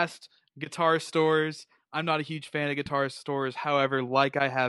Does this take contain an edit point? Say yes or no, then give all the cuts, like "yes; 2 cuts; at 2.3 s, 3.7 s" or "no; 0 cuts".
no; 0 cuts